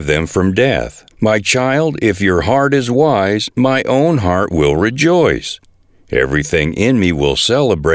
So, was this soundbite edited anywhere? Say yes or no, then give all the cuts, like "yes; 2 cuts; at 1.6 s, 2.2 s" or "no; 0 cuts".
yes; 1 cut; at 1.1 s